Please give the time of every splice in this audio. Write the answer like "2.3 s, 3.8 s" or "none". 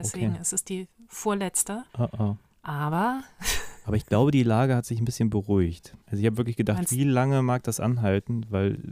1.9 s, 6.0 s

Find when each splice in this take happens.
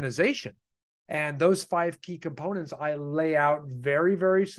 none

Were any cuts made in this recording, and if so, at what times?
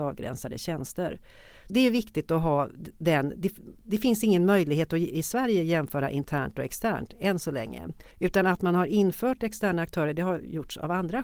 1.7 s, 8.1 s

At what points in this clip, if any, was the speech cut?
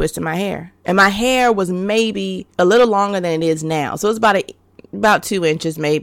2.5 s

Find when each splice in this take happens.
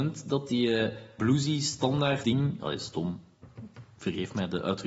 1.2 s, 2.2 s

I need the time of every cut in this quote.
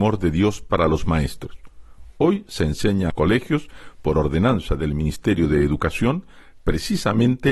3.1 s

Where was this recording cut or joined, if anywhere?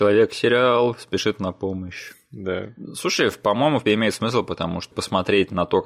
3.9 s, 4.9 s

